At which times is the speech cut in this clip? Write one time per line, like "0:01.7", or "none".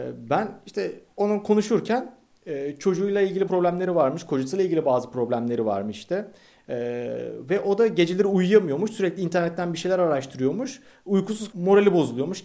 0:03.5
0:11.5